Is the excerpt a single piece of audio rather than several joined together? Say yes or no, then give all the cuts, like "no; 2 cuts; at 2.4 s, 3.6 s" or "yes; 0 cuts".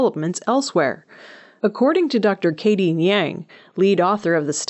yes; 0 cuts